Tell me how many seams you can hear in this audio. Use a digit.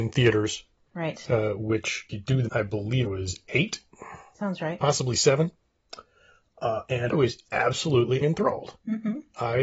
5